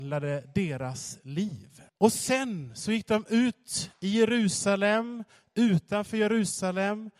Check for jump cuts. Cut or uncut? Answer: cut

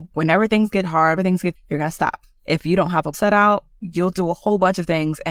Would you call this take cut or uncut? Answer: cut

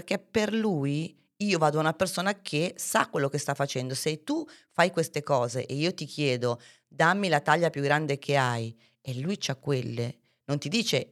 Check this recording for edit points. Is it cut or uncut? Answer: uncut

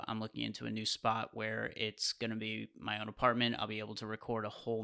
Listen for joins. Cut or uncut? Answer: uncut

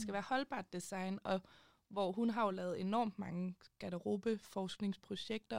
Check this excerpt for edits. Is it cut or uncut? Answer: uncut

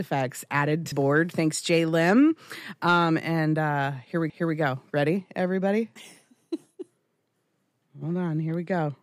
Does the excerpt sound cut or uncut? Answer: cut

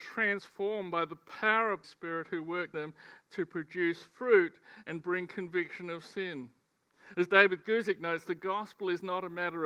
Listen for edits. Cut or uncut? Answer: cut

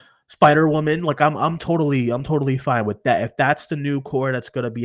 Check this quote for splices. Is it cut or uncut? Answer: uncut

